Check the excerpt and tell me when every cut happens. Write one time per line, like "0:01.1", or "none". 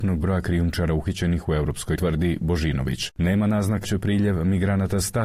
0:02.0
0:03.8